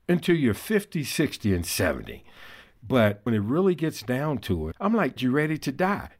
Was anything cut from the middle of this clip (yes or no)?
yes